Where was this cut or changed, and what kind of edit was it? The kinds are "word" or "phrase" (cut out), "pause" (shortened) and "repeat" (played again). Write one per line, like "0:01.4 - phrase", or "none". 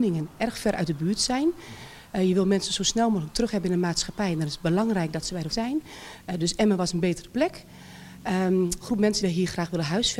0:05.5 - word
0:08.8 - word
0:09.2 - word

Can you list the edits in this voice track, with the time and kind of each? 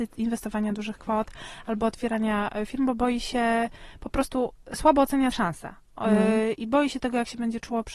0:05.3 - word

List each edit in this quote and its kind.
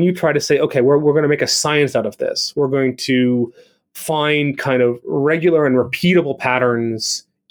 none

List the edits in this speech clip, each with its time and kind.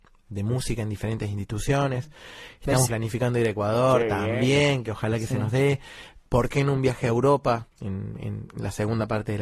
0:02.9 - phrase
0:06.3 - pause
0:07.7 - pause

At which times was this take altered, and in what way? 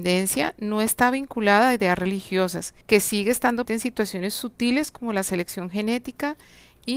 0:02.8 - pause
0:03.7 - word

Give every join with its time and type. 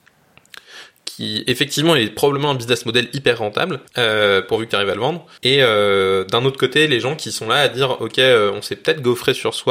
0:03.9 - pause
0:05.4 - pause

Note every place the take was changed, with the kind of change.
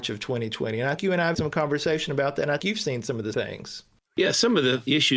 0:01.0 - word
0:01.3 - word
0:02.6 - word
0:03.3 - word

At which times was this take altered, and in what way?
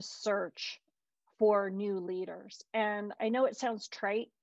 0:03.2 - word

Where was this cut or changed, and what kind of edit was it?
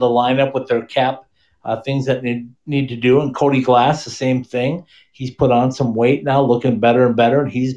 none

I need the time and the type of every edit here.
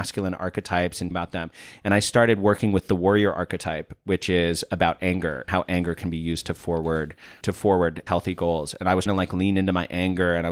0:01.1 - word
0:05.5 - word
0:07.4 - word
0:08.1 - word
0:09.1 - word

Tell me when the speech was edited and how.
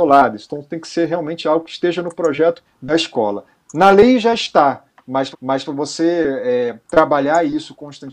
0:02.6 - word
0:05.3 - repeat

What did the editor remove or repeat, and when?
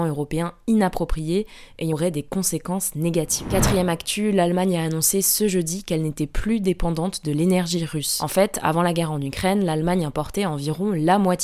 0:01.9 - phrase

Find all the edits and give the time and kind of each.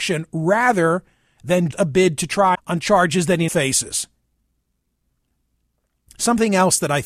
0:01.7 - word
0:02.5 - word
0:03.5 - word

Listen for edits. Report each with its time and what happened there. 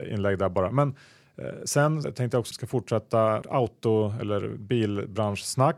0:02.0 - word
0:02.5 - word
0:03.4 - word

